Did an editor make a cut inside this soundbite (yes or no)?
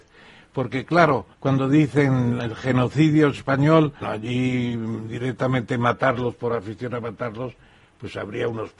yes